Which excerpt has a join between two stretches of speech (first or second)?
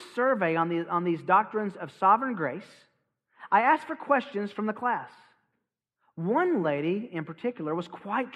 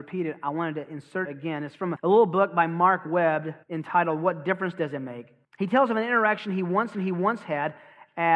second